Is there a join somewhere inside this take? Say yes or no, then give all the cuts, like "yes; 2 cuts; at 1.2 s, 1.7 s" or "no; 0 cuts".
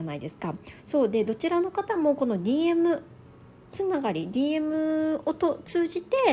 no; 0 cuts